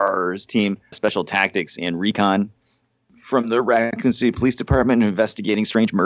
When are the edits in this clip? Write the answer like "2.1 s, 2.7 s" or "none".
0.9 s